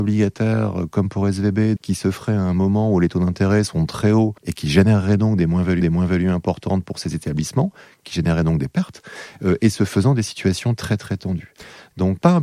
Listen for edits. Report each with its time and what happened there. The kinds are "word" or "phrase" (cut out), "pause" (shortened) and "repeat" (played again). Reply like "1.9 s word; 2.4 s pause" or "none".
1.8 s word; 4.4 s pause; 5.8 s repeat